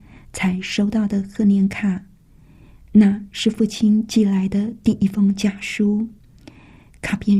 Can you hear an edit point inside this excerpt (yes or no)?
no